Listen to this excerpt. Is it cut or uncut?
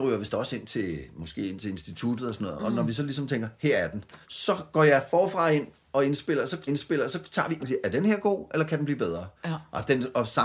cut